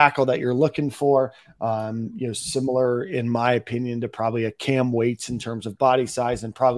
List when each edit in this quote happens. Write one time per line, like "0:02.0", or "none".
none